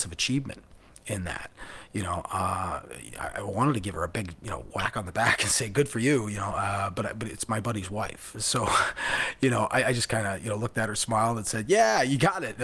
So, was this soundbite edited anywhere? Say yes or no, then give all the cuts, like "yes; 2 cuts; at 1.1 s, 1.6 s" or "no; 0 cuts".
no; 0 cuts